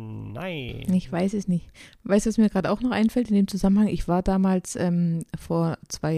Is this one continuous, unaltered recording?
yes; 0 cuts

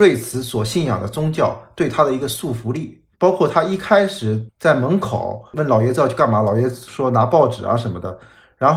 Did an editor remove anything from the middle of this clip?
yes; 1 cut; at 3.1 s

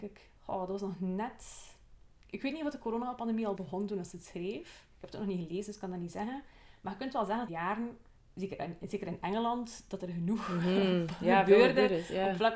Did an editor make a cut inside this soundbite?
yes; 3 cuts; at 3.6 s, 7.5 s, 8.2 s

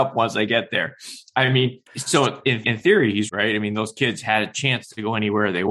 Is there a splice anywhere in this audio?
yes; 3 cuts; at 1.9 s, 2.6 s, 3.3 s

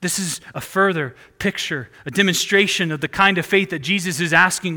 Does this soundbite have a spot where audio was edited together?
no; 0 cuts

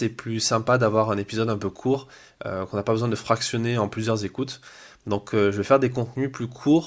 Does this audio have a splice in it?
no; 0 cuts

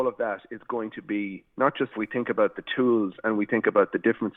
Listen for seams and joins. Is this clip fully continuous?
no; 1 cut; at 1.9 s

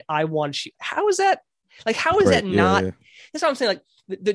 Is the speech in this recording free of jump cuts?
yes; 0 cuts

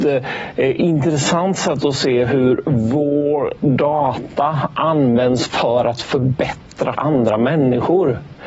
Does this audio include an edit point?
yes; 1 cut; at 6.9 s

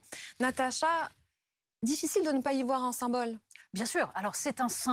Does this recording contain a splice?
no; 0 cuts

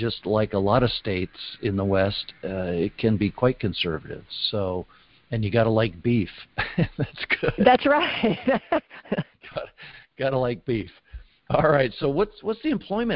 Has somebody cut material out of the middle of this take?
no; 0 cuts

